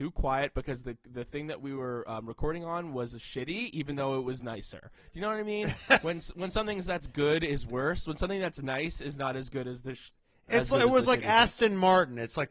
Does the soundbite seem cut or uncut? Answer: uncut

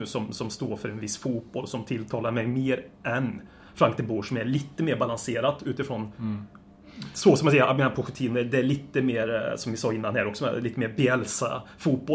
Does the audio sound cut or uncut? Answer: uncut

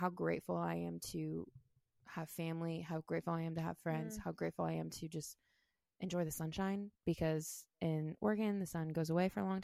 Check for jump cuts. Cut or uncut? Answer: uncut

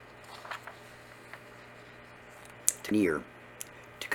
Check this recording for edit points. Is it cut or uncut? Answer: cut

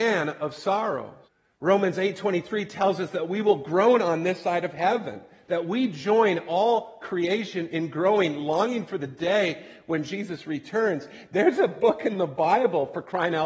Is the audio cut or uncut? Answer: cut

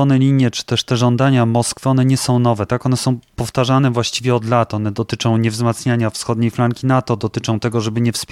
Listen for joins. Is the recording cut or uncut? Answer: uncut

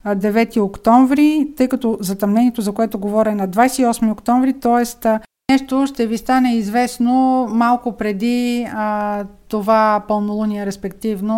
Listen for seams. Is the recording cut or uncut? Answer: uncut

